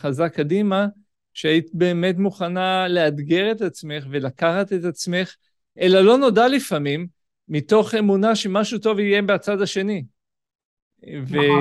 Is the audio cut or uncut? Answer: uncut